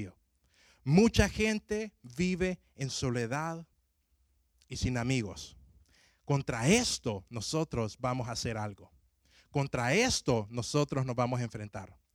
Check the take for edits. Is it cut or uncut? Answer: uncut